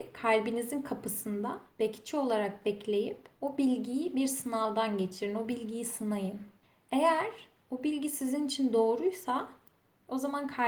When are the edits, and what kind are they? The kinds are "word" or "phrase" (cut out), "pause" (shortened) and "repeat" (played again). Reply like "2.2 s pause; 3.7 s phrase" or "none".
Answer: 1.7 s pause; 3.3 s pause; 6.6 s pause